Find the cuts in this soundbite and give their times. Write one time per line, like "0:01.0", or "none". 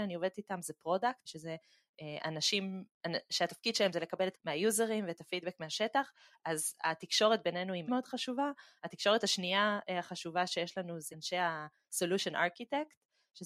0:01.3
0:04.3
0:07.9
0:11.1